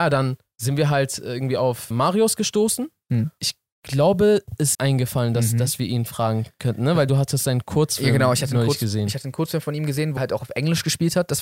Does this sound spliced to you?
yes; 3 cuts; at 1.9 s, 4.7 s, 10.2 s

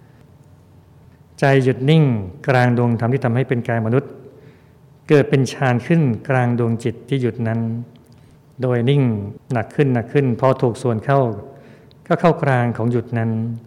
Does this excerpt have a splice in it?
no; 0 cuts

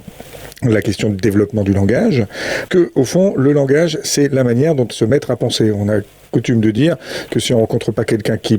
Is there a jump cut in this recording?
yes; 2 cuts; at 2.7 s, 4.9 s

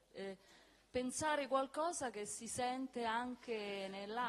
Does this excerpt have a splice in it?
no; 0 cuts

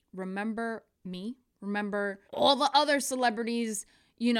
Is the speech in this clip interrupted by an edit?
yes; 2 cuts; at 0.9 s, 2.3 s

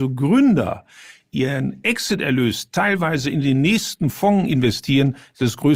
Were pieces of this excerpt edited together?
no; 0 cuts

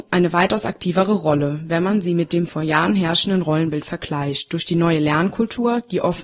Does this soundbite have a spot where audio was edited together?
no; 0 cuts

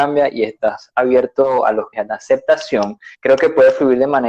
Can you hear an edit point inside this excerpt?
yes; 2 cuts; at 1.9 s, 3.1 s

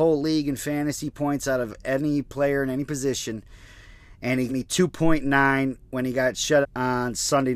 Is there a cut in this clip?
yes; 2 cuts; at 4.5 s, 6.6 s

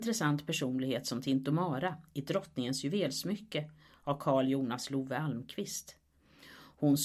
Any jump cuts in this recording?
no; 0 cuts

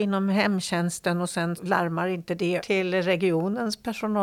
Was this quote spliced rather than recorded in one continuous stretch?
yes; 2 cuts; at 1.6 s, 2.6 s

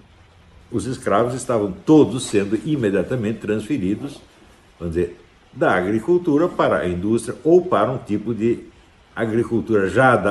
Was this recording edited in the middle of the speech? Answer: no; 0 cuts

